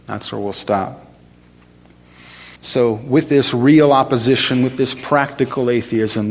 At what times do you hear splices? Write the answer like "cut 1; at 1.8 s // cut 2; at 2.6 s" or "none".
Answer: cut 1; at 2.6 s